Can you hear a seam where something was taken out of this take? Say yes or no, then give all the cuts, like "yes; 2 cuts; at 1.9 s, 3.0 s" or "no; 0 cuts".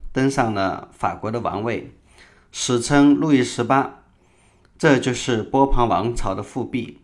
no; 0 cuts